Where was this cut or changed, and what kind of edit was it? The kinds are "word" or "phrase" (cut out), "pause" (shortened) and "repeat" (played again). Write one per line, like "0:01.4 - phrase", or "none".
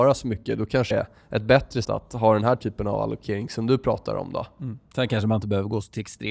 0:00.9 - word
0:01.8 - word
0:04.8 - pause